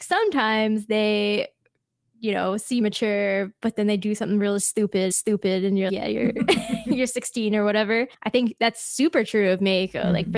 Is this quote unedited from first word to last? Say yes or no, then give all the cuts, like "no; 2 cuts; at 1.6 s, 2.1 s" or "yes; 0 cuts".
no; 4 cuts; at 2.8 s, 5.1 s, 5.9 s, 8.1 s